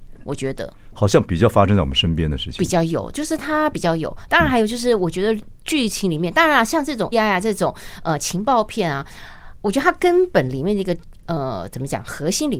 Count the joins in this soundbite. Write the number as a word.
one